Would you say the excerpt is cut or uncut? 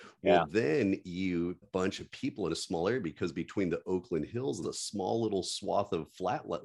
cut